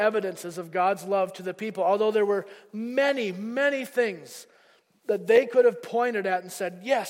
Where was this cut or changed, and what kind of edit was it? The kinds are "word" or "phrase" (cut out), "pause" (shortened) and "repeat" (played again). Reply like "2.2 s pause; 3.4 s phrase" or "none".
none